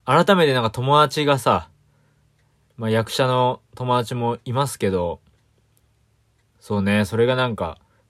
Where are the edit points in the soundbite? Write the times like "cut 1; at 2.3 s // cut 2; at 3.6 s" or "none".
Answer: none